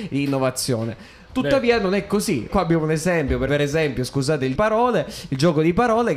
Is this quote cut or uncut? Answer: cut